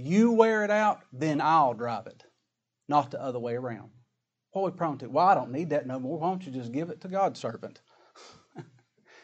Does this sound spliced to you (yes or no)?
no